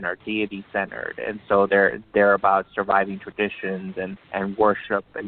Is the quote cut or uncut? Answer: cut